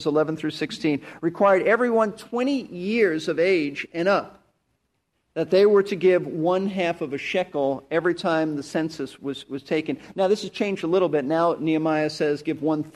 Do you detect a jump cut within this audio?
no; 0 cuts

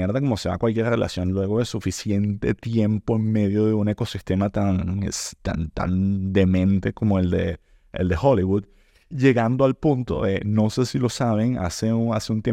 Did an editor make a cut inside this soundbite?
no; 0 cuts

